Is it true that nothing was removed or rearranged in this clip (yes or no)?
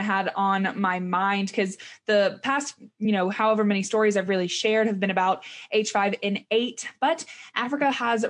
yes